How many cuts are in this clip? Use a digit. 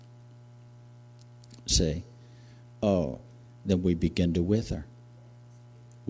0